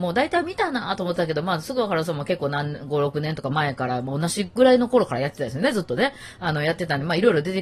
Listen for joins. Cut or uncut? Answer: uncut